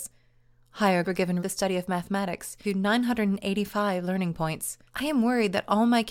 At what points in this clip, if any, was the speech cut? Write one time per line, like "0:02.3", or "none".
0:01.0
0:01.4
0:02.6
0:04.9